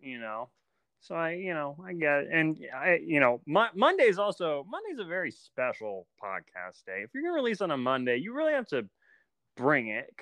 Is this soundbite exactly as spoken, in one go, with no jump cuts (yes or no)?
yes